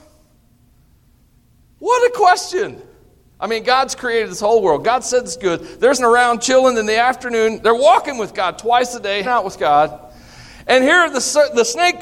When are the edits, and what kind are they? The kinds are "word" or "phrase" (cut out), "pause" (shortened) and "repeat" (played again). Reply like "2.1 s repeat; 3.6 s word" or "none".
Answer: 6.0 s word; 9.2 s word